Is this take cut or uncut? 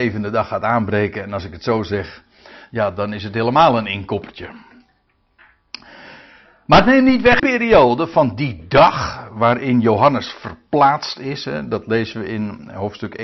cut